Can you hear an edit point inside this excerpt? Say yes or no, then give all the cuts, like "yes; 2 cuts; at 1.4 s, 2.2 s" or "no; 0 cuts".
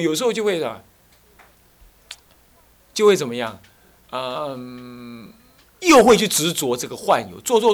no; 0 cuts